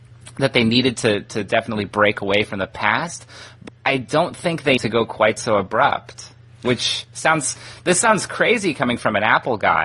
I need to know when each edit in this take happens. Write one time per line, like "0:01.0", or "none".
0:03.7
0:04.8